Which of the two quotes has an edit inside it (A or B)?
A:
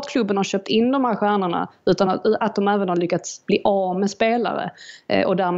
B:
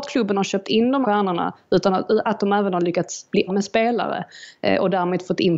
B